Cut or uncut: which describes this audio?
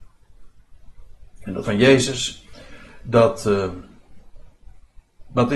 cut